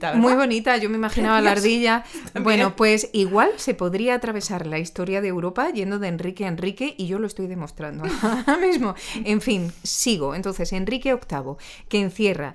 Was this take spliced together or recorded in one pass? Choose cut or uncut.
uncut